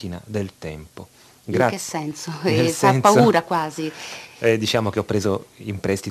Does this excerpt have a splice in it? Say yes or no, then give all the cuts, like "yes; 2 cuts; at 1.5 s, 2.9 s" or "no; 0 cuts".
no; 0 cuts